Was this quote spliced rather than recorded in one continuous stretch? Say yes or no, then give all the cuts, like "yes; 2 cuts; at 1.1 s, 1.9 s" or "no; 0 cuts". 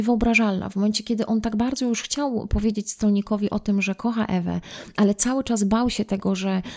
no; 0 cuts